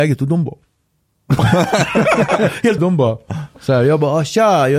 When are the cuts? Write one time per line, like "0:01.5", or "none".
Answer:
0:02.8